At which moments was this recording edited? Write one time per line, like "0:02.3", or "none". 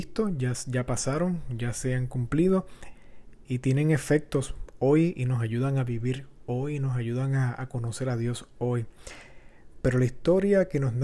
0:03.4